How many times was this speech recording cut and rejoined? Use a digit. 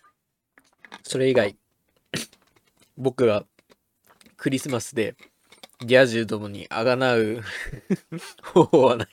0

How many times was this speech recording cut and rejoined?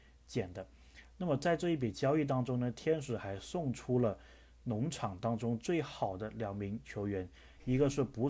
0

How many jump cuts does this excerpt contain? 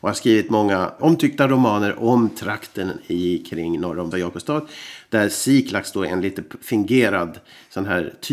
1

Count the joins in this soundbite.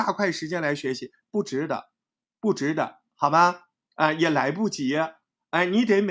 0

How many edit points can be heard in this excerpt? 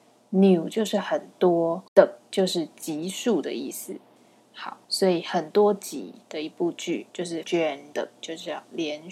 6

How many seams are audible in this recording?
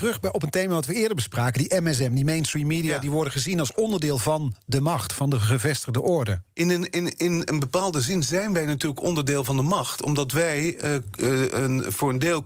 1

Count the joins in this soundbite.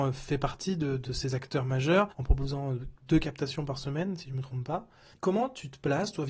3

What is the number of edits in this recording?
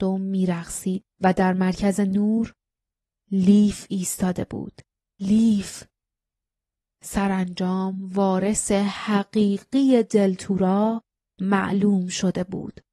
1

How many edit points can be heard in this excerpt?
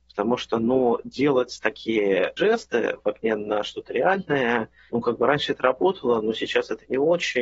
1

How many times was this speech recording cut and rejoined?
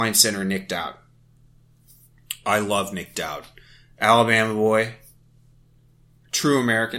0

